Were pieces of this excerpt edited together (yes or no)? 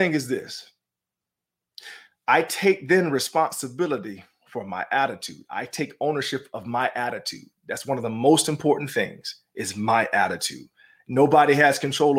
no